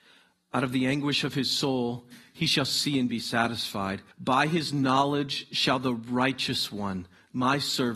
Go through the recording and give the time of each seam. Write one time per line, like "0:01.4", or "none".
0:04.1